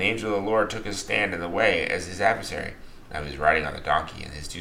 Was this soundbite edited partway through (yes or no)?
no